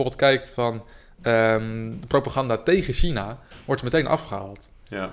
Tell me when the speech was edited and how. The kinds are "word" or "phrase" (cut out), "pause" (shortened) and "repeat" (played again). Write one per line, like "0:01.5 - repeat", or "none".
none